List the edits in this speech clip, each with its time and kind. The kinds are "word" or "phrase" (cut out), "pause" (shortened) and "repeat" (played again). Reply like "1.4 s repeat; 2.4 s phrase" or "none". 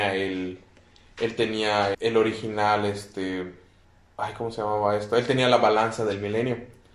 1.9 s word; 3.8 s pause